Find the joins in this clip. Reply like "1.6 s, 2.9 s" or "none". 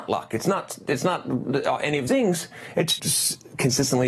2.1 s, 3.0 s